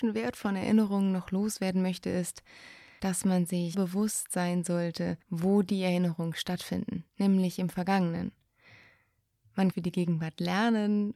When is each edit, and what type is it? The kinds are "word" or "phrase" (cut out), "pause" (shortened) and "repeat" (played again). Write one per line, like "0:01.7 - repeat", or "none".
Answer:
0:03.7 - word
0:05.2 - pause
0:07.1 - pause
0:09.7 - phrase